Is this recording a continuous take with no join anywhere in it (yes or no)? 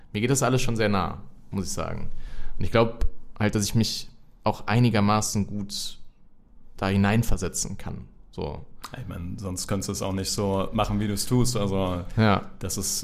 yes